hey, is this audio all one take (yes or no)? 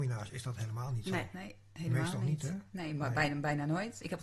yes